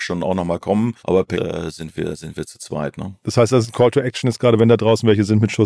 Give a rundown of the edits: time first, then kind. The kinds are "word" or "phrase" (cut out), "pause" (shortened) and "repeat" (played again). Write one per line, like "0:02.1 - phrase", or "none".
0:01.0 - pause
0:01.3 - word